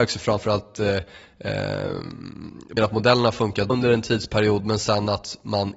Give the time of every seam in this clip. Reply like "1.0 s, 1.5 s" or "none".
2.8 s, 3.7 s